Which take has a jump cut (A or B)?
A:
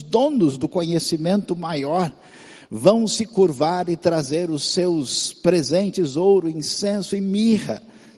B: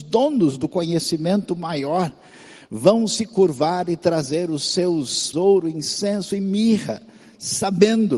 B